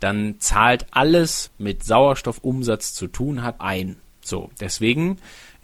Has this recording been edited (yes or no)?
yes